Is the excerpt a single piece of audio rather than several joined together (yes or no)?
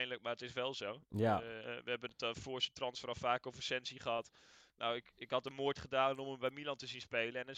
yes